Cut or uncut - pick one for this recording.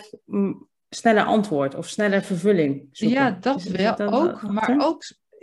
uncut